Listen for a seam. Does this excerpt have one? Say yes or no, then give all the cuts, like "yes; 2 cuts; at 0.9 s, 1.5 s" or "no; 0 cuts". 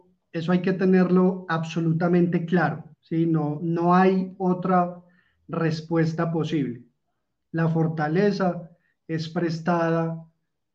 yes; 1 cut; at 2.9 s